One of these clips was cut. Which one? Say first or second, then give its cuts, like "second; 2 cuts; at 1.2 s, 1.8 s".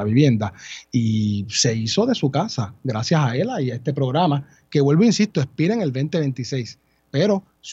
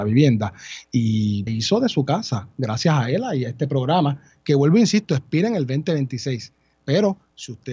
second; 1 cut; at 1.5 s